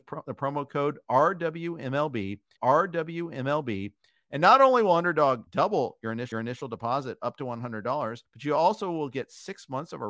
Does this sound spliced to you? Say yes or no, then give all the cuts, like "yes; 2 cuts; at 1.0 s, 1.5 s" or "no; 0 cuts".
yes; 4 cuts; at 2.6 s, 5.5 s, 6.3 s, 8.2 s